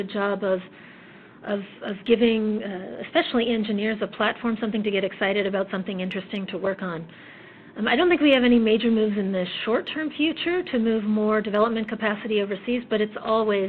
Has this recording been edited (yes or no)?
no